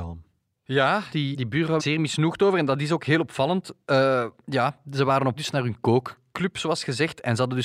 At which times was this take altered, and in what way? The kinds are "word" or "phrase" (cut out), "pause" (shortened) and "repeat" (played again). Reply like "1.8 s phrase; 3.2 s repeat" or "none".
1.3 s word; 1.8 s phrase; 5.4 s word